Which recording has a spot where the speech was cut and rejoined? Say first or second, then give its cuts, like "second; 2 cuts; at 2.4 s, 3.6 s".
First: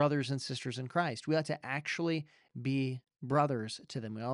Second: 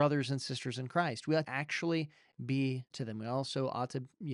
second; 2 cuts; at 1.4 s, 2.9 s